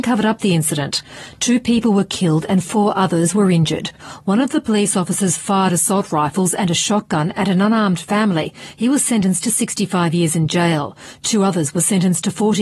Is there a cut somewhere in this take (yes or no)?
no